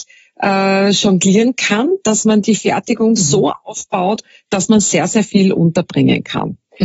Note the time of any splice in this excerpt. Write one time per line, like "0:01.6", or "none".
none